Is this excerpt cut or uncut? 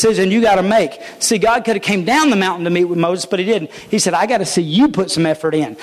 uncut